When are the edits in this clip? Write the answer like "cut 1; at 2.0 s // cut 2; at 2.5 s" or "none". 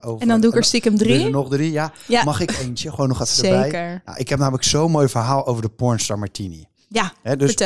none